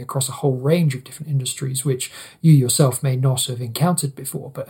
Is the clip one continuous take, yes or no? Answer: yes